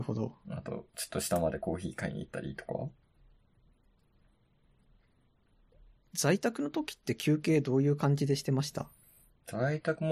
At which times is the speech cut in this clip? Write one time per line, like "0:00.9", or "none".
none